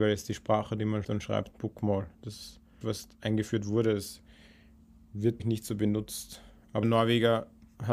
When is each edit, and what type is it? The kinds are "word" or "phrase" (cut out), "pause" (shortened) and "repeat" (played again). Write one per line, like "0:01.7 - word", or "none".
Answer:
0:01.0 - word
0:01.5 - word
0:02.8 - phrase
0:05.4 - word
0:06.8 - word

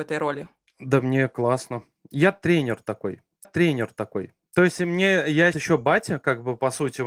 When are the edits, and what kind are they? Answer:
0:03.4 - repeat
0:05.5 - word

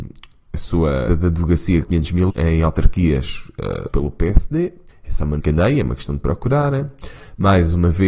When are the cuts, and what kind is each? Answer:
0:01.1 - phrase
0:01.8 - word
0:02.3 - word
0:03.9 - word
0:04.9 - pause
0:05.4 - word

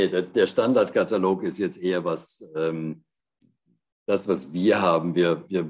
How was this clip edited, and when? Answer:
none

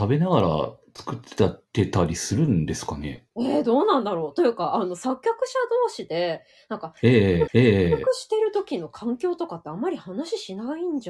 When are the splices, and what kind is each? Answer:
0:07.5 - repeat

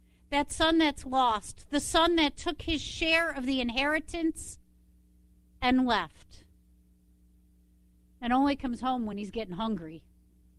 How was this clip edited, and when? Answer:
none

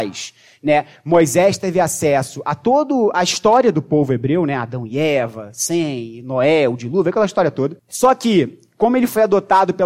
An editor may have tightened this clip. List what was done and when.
0:07.8 - pause

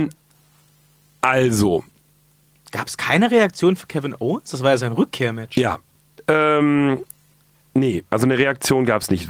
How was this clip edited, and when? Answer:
none

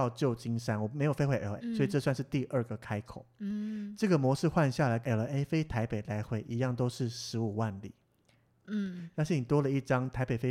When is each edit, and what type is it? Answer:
0:01.6 - word
0:05.0 - word

